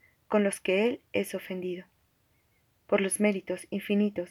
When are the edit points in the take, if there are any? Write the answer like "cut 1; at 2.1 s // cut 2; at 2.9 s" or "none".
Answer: none